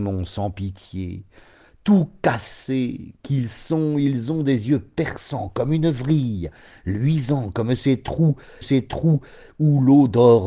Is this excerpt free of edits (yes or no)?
no